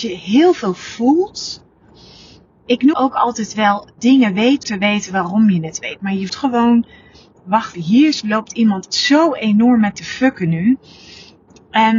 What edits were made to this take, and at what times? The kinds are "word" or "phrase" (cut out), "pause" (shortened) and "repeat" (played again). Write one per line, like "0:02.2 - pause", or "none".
0:02.9 - word
0:04.0 - word
0:04.6 - word
0:06.3 - word
0:07.7 - word
0:08.9 - word
0:09.9 - word